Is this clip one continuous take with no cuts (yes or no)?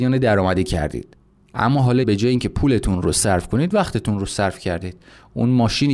no